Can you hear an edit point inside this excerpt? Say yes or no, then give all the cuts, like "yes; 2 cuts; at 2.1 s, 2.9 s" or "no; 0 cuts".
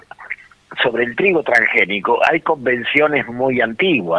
no; 0 cuts